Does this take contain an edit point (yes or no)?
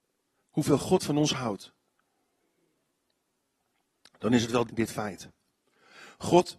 yes